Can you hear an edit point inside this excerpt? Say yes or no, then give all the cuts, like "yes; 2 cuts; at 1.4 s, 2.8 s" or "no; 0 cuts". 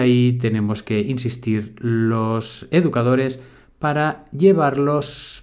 no; 0 cuts